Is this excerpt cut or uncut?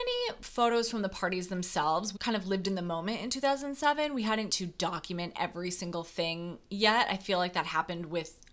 cut